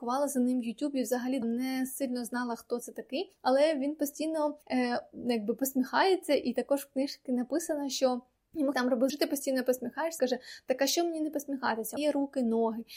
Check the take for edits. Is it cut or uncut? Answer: cut